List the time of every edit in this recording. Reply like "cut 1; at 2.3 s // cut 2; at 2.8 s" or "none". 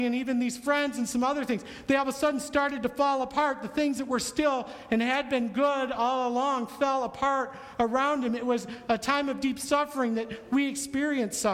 none